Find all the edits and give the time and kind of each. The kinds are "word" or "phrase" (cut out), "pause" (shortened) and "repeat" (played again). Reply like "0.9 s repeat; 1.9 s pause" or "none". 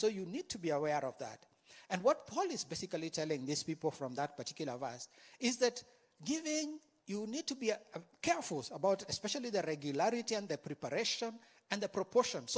none